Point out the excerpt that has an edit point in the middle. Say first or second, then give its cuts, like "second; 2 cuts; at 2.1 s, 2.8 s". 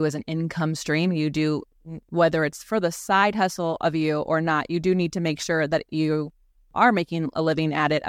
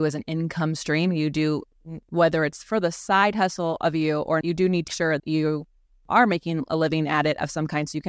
second; 3 cuts; at 4.4 s, 4.9 s, 5.2 s